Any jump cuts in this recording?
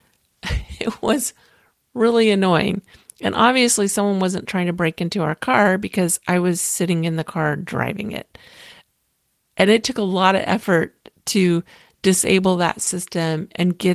no; 0 cuts

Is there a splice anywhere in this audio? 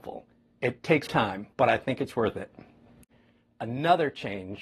yes; 2 cuts; at 1.1 s, 1.5 s

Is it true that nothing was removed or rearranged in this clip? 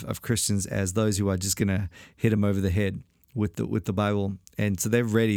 yes; 0 cuts

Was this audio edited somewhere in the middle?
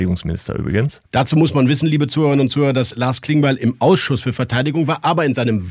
yes; 1 cut; at 1.1 s

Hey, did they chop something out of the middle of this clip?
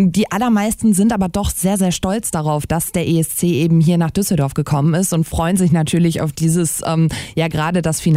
no; 0 cuts

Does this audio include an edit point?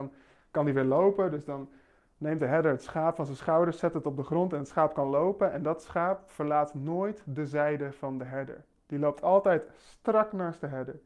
no; 0 cuts

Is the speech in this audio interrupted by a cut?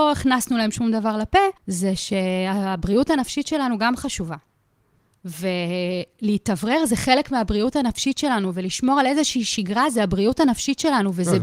yes; 1 cut; at 1.6 s

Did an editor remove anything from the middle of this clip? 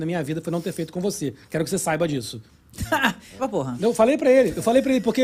yes; 1 cut; at 3.4 s

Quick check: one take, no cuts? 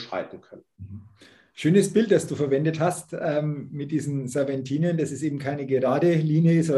yes; 0 cuts

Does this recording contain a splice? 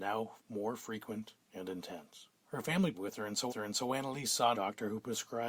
yes; 5 cuts; at 1.4 s, 2.4 s, 2.9 s, 3.5 s, 4.5 s

